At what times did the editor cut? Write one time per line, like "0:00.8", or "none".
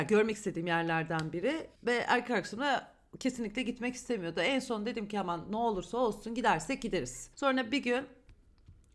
0:01.7
0:07.3